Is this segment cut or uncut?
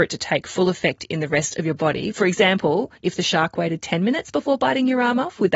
cut